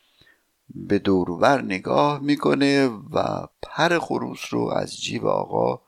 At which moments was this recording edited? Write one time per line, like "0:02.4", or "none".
0:03.5